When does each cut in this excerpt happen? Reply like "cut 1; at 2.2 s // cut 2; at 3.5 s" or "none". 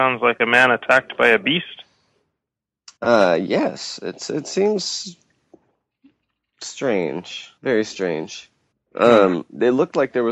cut 1; at 3.0 s // cut 2; at 7.6 s // cut 3; at 8.7 s

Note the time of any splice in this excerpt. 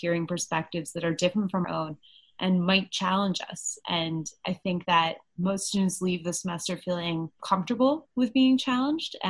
cut 1; at 1.6 s

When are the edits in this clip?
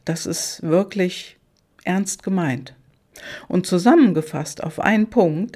none

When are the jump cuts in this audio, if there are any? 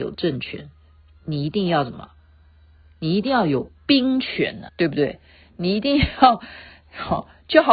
cut 1; at 4.7 s

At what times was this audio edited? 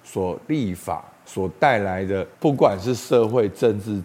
cut 1; at 2.3 s

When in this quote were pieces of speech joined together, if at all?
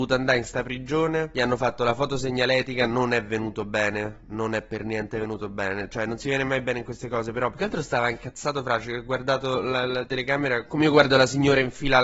none

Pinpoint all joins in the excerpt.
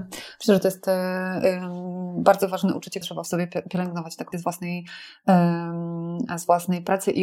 cut 1; at 3.0 s // cut 2; at 4.3 s

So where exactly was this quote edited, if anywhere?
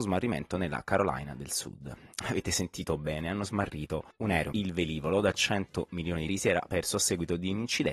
cut 1; at 4.5 s // cut 2; at 6.3 s

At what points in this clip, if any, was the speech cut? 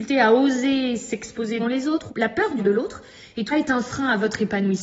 cut 1; at 1.6 s // cut 2; at 2.1 s // cut 3; at 2.6 s // cut 4; at 3.5 s

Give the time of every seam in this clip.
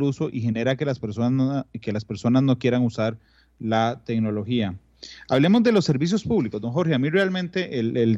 none

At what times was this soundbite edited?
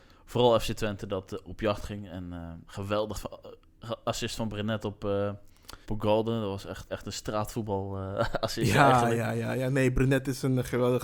cut 1; at 2.7 s // cut 2; at 3.1 s // cut 3; at 5.8 s // cut 4; at 6.9 s

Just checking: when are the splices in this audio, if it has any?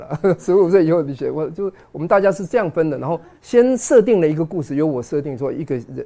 cut 1; at 3.4 s

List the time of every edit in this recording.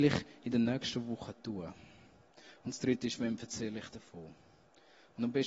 none

